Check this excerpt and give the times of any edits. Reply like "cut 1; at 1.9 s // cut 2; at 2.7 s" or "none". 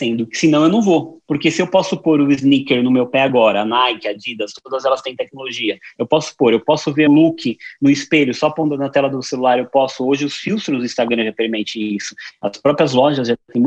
cut 1; at 7.1 s